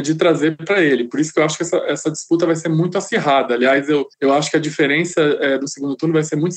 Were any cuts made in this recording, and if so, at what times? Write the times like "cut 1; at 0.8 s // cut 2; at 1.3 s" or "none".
cut 1; at 4.1 s